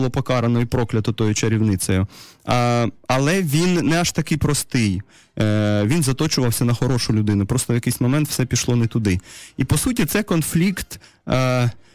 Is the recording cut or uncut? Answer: uncut